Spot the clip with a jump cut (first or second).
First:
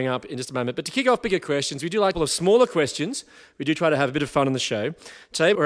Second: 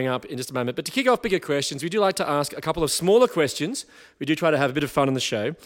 first